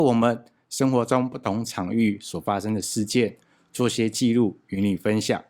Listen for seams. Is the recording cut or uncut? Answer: uncut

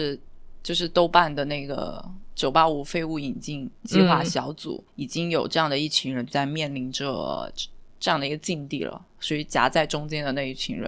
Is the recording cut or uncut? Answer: cut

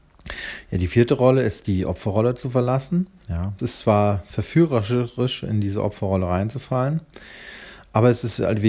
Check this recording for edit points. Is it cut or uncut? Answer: cut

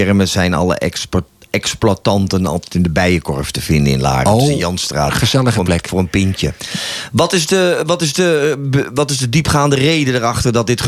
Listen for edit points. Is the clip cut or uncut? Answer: uncut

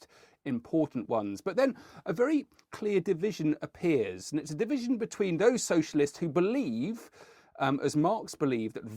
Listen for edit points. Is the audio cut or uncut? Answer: uncut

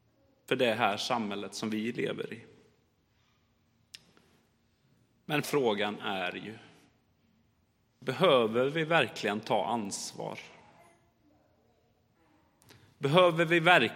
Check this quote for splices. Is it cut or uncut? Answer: cut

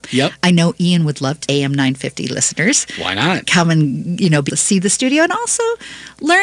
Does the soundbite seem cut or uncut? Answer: cut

